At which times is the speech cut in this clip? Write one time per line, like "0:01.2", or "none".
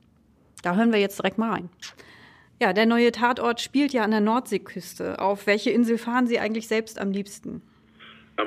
none